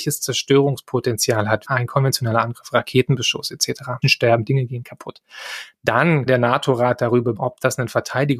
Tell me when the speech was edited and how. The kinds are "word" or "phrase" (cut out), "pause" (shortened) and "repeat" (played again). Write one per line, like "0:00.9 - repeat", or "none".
0:01.6 - word
0:04.0 - word
0:06.3 - word
0:07.4 - word

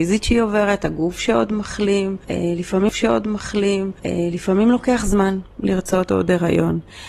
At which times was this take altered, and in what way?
0:02.9 - repeat

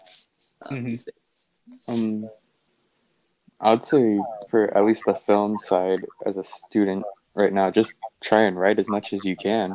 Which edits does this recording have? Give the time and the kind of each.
0:04.5 - word

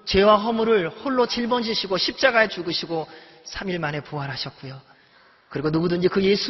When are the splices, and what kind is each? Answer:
0:01.3 - word
0:02.5 - word

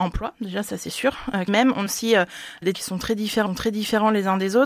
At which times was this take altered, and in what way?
0:01.5 - phrase
0:01.9 - word
0:02.7 - word
0:03.5 - repeat

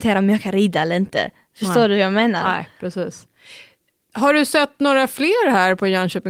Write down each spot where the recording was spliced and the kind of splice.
none

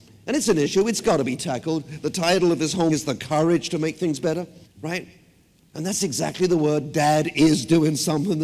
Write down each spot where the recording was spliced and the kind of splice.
0:02.9 - word
0:04.6 - pause

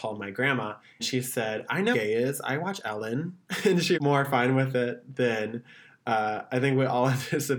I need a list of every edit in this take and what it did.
0:01.0 - word
0:01.9 - word
0:03.9 - word

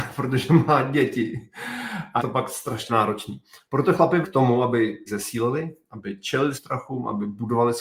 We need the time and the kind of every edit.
0:02.2 - word
0:02.9 - word
0:04.2 - word
0:05.1 - word
0:06.5 - word

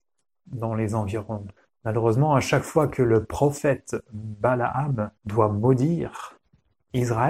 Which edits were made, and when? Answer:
0:01.6 - pause
0:05.2 - pause

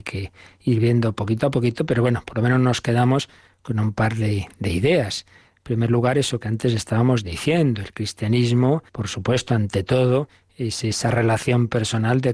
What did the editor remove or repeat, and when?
0:08.9 - pause

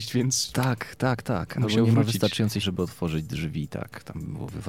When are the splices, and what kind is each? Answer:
0:02.6 - word

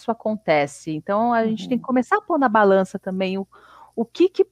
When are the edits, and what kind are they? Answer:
none

